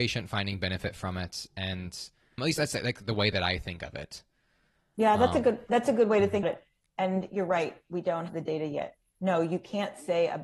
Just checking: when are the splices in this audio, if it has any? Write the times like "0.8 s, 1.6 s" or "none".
2.4 s, 6.4 s, 8.3 s